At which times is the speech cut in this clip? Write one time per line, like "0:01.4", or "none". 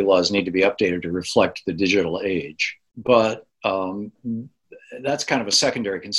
0:02.9